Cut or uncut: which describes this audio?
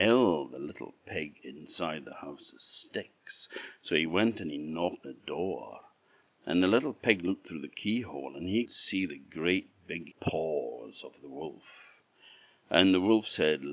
cut